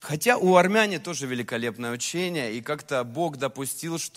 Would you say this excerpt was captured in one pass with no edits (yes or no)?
yes